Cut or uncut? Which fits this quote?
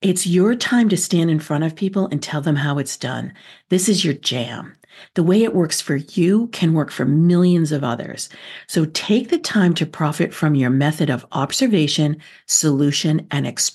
uncut